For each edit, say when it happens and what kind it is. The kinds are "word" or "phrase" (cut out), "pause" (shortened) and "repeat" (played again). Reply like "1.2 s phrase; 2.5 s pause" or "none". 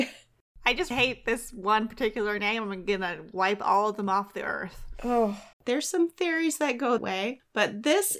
0.9 s word; 5.5 s pause; 7.0 s word

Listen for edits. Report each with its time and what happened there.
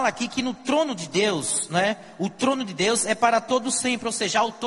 none

